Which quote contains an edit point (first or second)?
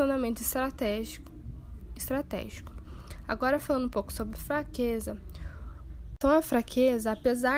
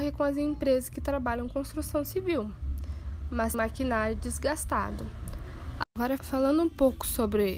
second